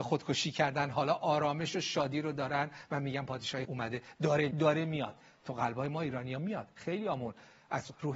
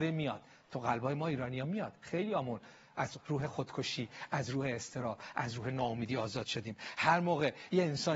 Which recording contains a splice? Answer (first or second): first